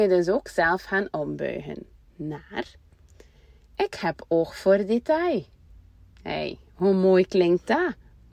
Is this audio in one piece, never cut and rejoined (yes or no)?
yes